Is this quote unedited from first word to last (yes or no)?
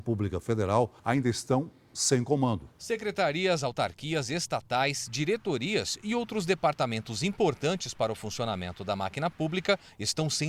no